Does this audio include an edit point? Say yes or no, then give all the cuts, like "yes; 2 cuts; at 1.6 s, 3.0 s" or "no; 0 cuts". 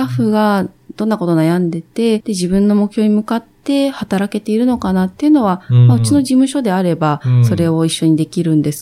yes; 1 cut; at 2.2 s